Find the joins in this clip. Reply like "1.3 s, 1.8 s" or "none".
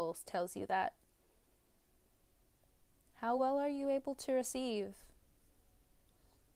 none

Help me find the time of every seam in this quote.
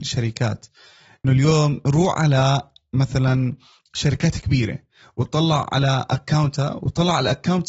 1.2 s

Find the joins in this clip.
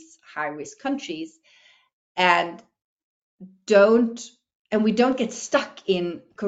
none

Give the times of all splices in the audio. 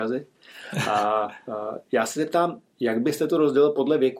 none

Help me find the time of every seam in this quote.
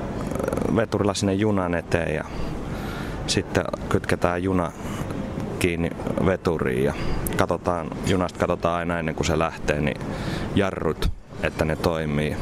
none

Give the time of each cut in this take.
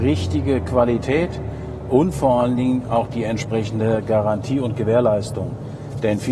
none

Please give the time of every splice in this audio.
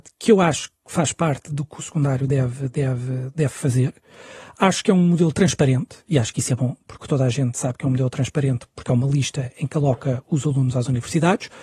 none

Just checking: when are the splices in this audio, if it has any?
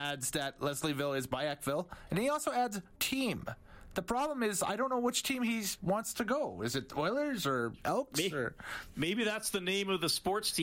3.0 s

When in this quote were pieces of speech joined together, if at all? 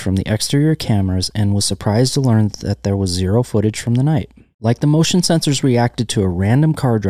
none

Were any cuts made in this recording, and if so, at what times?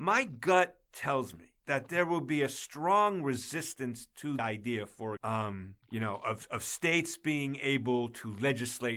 1.6 s, 4.4 s, 5.2 s, 5.8 s

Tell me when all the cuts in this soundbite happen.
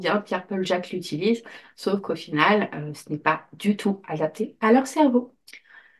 none

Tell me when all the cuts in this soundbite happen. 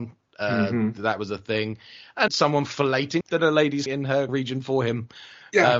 2.3 s, 3.2 s, 3.9 s, 4.3 s

